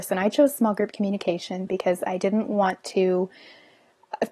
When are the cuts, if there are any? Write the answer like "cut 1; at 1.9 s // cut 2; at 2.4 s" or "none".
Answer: none